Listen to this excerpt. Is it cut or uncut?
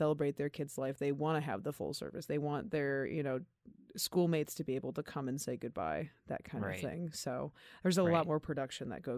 uncut